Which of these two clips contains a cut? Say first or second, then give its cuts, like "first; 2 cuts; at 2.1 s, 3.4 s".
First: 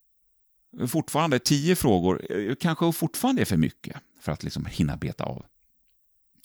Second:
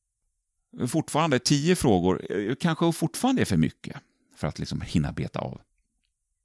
first; 1 cut; at 4.1 s